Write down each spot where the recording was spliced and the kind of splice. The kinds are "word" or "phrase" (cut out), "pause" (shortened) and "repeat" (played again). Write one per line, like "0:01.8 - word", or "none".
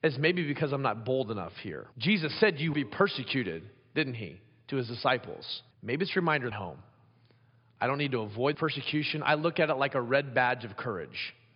0:01.9 - pause
0:02.7 - word
0:05.7 - pause
0:06.5 - phrase
0:08.5 - word